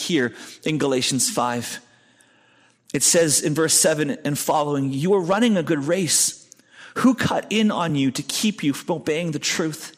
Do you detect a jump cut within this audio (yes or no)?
no